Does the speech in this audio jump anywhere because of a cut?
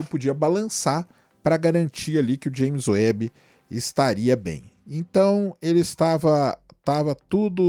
no; 0 cuts

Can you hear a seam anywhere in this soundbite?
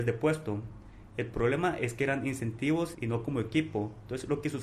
yes; 1 cut; at 2.9 s

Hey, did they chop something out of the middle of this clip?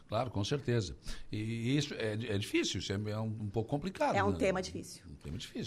no; 0 cuts

